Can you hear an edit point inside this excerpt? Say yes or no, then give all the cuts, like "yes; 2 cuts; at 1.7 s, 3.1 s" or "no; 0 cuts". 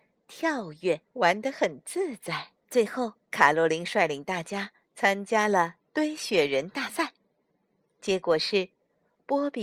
yes; 3 cuts; at 1.0 s, 2.6 s, 3.2 s